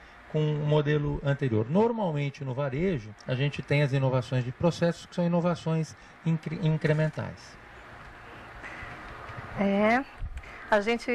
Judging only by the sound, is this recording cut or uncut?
cut